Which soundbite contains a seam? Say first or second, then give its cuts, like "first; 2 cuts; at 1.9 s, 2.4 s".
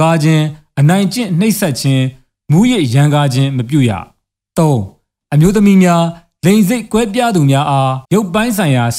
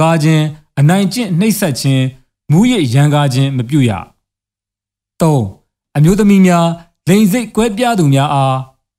first; 2 cuts; at 4.4 s, 8.0 s